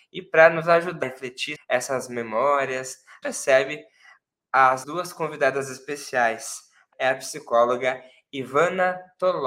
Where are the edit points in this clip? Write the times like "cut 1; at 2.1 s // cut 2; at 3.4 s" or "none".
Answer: cut 1; at 1.0 s // cut 2; at 1.6 s // cut 3; at 3.2 s // cut 4; at 4.8 s // cut 5; at 6.9 s